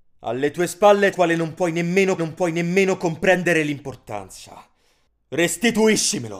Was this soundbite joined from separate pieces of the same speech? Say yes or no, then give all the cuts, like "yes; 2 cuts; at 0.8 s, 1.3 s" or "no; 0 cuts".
yes; 2 cuts; at 1.1 s, 2.2 s